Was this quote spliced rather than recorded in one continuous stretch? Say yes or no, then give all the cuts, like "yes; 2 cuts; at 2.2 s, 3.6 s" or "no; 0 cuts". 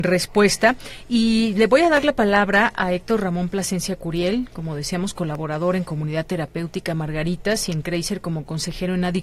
no; 0 cuts